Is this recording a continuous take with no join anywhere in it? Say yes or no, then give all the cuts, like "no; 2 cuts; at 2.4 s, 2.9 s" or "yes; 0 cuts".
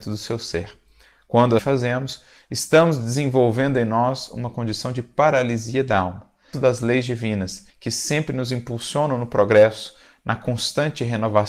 no; 3 cuts; at 1.6 s, 6.5 s, 7.7 s